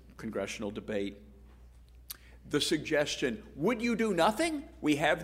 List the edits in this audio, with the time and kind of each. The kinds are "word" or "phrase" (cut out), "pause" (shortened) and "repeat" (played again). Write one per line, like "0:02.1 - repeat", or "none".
none

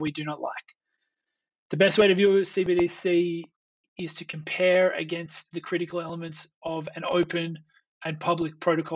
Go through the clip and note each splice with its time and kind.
none

